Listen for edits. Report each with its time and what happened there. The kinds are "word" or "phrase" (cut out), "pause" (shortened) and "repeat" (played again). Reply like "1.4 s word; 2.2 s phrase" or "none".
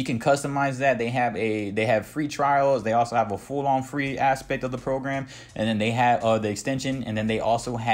none